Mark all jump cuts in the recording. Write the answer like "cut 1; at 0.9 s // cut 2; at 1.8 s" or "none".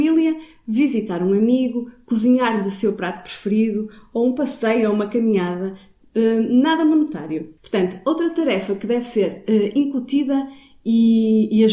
cut 1; at 7.6 s